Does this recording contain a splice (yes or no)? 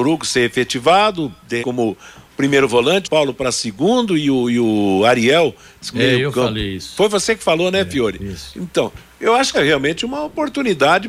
yes